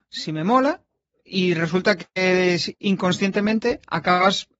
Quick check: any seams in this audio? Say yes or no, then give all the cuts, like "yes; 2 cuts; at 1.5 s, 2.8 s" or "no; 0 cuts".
no; 0 cuts